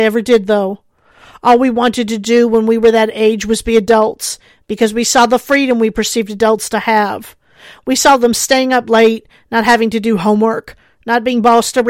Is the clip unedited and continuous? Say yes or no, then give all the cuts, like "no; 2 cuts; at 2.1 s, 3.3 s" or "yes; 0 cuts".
yes; 0 cuts